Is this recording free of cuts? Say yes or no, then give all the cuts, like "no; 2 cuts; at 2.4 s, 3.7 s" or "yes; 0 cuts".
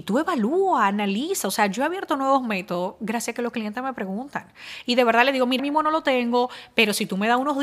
no; 1 cut; at 5.6 s